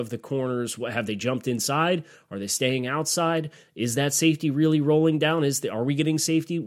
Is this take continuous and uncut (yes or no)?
yes